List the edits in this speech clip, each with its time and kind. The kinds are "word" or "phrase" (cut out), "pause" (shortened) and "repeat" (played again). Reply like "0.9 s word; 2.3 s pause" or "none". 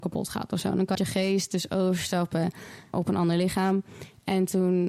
0.9 s phrase; 2.9 s word